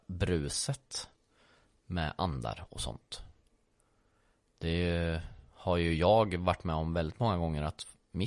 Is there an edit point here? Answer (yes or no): no